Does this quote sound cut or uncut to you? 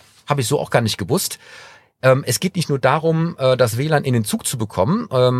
uncut